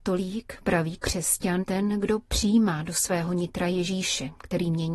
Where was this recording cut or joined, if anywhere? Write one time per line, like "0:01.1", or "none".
0:01.6